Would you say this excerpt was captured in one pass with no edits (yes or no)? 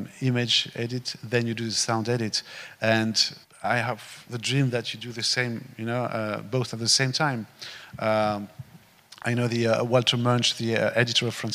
no